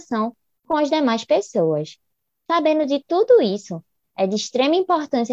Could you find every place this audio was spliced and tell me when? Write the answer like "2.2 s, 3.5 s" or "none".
none

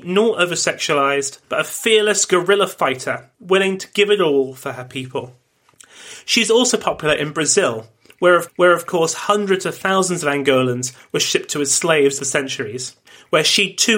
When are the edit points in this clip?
1.4 s, 3.3 s, 8.5 s, 12.2 s, 13.1 s

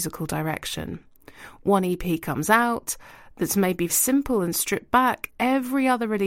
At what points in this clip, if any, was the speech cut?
3.9 s, 5.3 s

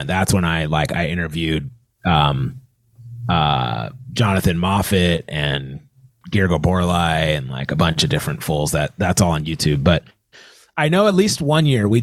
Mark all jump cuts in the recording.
none

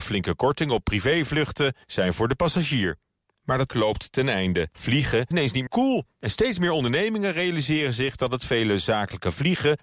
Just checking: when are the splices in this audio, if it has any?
3.7 s, 5.3 s, 5.7 s

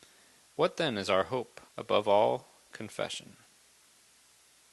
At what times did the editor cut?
1.7 s

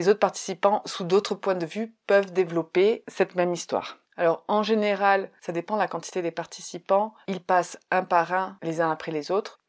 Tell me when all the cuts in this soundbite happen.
4.0 s, 7.2 s

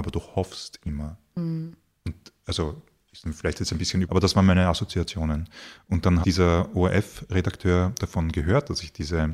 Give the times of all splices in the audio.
4.0 s, 6.2 s

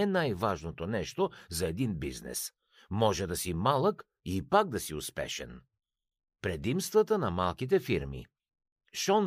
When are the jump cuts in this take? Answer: none

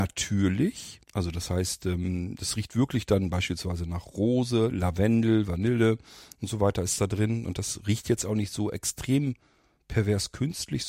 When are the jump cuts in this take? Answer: 1.0 s

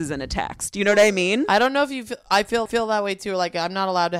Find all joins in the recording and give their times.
2.7 s

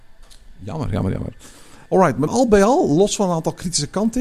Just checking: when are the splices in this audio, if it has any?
2.3 s

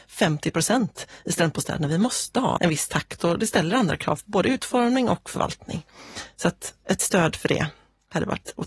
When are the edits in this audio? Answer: 2.6 s

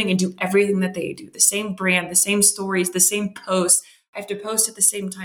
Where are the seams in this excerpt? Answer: none

